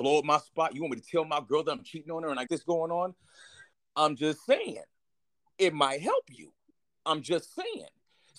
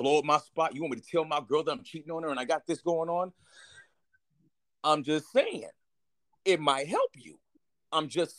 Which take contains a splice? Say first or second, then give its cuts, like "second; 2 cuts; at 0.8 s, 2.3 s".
first; 2 cuts; at 2.5 s, 3.7 s